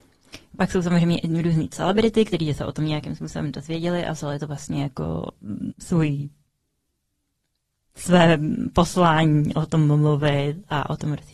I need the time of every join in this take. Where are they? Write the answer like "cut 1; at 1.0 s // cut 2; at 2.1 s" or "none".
cut 1; at 5.7 s

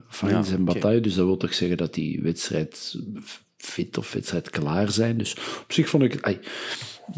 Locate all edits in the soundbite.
none

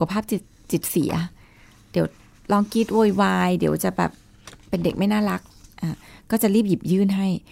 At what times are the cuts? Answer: none

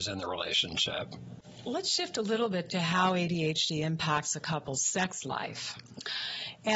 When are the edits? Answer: none

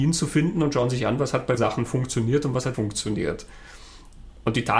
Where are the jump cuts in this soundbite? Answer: cut 1; at 1.6 s // cut 2; at 2.7 s

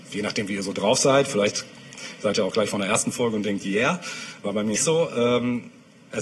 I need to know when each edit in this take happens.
cut 1; at 4.8 s

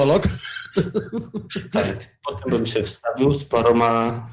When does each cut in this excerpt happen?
cut 1; at 2.5 s

